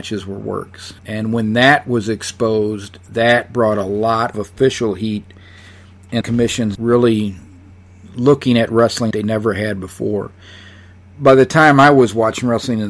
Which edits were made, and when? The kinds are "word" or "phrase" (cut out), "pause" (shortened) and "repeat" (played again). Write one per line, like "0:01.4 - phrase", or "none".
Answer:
0:01.0 - pause
0:04.3 - word
0:06.2 - phrase
0:06.7 - phrase
0:09.1 - word